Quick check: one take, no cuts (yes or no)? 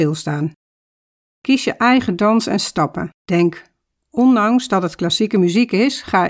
no